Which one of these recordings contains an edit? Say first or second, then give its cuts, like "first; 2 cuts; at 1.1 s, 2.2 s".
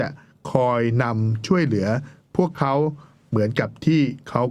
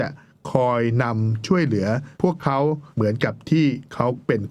second; 2 cuts; at 2.1 s, 2.9 s